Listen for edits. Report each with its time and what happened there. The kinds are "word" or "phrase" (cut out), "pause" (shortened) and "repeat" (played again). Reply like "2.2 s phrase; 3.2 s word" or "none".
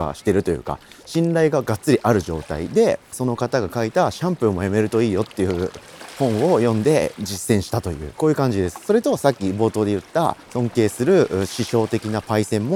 3.1 s phrase; 10.4 s pause

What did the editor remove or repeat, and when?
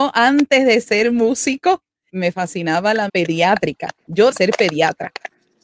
2.1 s word; 3.1 s word; 4.3 s word

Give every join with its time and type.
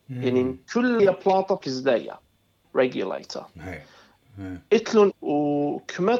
1.0 s word; 1.6 s word; 2.6 s word; 5.1 s word

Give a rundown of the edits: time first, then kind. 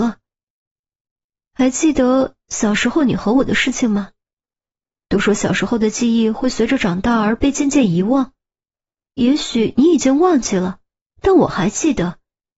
none

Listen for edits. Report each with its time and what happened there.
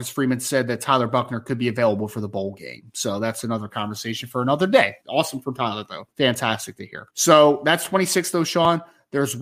5.0 s pause; 6.1 s pause; 7.1 s pause

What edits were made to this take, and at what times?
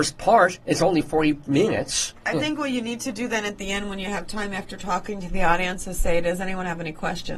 none

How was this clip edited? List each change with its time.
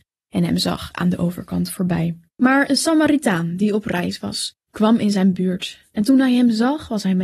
2.3 s pause; 4.6 s pause; 5.9 s pause

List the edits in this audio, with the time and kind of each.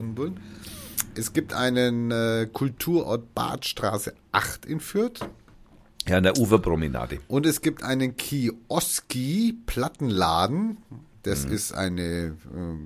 none

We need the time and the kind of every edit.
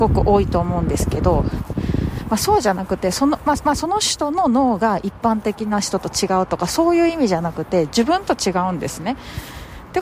3.6 s repeat

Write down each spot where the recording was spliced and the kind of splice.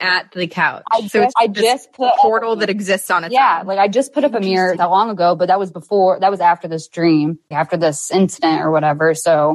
1.3 s word; 4.8 s word; 7.5 s word

